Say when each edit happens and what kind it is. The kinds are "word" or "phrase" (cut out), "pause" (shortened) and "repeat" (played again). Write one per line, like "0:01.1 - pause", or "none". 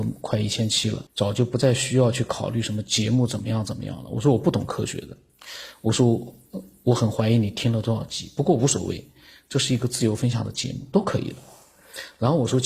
0:01.1 - pause